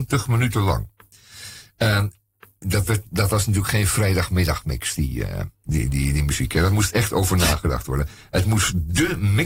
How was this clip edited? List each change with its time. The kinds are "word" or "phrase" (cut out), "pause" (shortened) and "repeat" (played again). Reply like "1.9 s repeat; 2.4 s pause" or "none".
none